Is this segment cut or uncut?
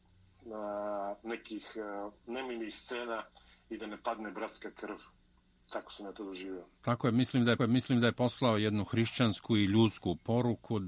cut